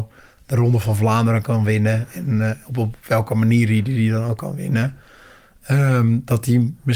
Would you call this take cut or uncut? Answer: uncut